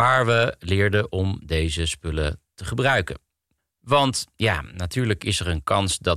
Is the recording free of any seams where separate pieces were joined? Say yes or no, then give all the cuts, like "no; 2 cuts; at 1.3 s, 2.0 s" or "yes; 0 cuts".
yes; 0 cuts